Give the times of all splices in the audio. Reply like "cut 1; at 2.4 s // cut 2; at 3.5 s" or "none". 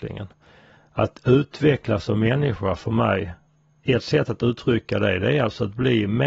cut 1; at 3.5 s